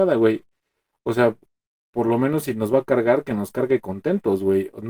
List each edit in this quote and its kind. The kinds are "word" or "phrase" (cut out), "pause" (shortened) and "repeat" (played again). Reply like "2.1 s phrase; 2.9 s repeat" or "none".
none